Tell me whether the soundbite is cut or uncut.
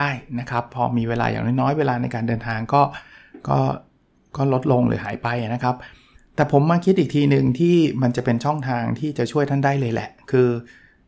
cut